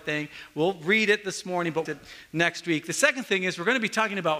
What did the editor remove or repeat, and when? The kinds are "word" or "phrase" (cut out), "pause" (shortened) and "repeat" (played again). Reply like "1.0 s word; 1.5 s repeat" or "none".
1.9 s phrase